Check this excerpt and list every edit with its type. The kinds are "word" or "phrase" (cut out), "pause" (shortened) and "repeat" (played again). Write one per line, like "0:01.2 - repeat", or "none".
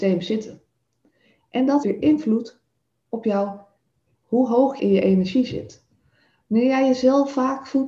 0:01.8 - word
0:04.1 - word
0:04.8 - word

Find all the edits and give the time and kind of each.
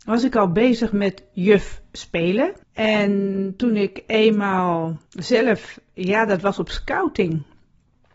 0:02.6 - pause
0:05.1 - pause

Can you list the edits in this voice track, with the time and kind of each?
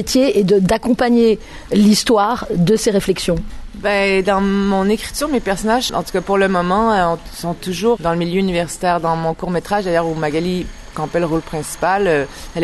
0:05.9 - word
0:08.0 - word
0:10.9 - word

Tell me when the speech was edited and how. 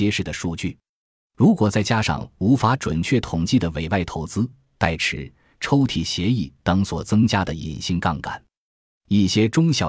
none

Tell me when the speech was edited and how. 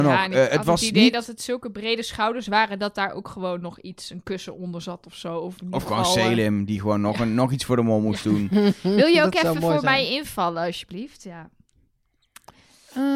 none

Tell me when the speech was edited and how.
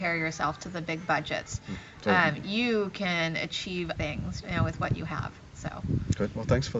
0:04.0 - word
0:04.4 - word

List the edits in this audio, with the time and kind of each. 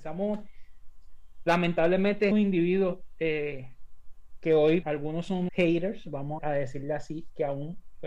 0:02.3 - word
0:04.8 - word
0:05.5 - word
0:06.4 - word

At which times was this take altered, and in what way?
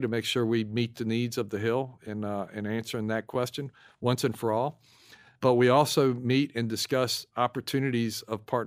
none

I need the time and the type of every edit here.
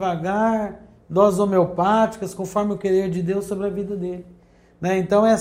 none

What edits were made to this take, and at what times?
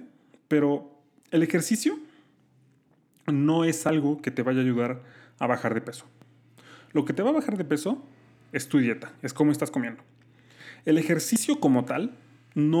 none

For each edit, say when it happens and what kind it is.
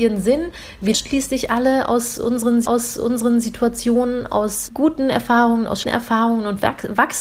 0:00.9 - word
0:02.6 - repeat
0:04.7 - word
0:05.8 - word

